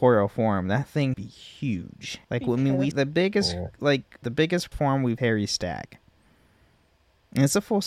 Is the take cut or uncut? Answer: cut